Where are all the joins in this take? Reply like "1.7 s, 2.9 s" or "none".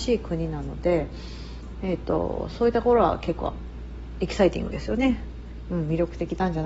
none